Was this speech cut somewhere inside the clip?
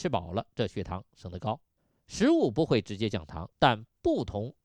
yes; 2 cuts; at 1.8 s, 3.5 s

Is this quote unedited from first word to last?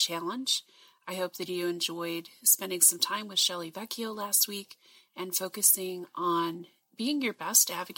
yes; 0 cuts

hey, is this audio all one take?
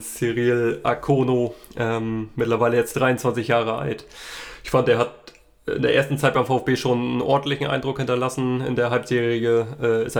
yes; 0 cuts

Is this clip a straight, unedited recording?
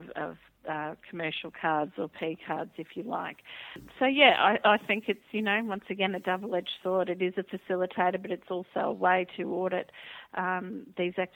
yes; 0 cuts

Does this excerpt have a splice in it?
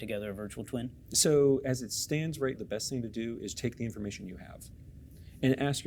yes; 2 cuts; at 2.5 s, 3.5 s

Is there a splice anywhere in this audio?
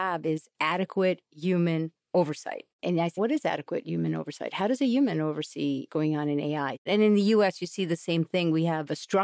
yes; 3 cuts; at 2.7 s, 3.2 s, 5.9 s

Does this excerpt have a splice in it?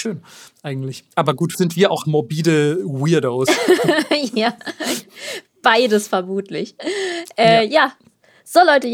yes; 3 cuts; at 1.1 s, 1.5 s, 2.0 s

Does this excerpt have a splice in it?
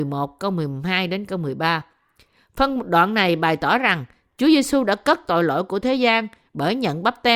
no; 0 cuts

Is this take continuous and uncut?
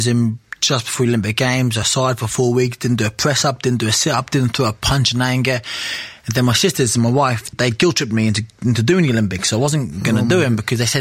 no; 2 cuts; at 1.8 s, 7.5 s

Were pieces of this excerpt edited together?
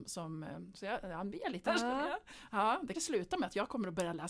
yes; 2 cuts; at 1.6 s, 2.9 s

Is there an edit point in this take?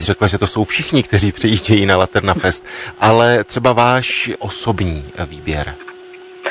no; 0 cuts

